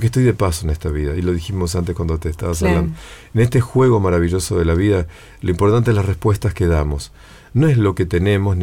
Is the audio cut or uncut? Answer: uncut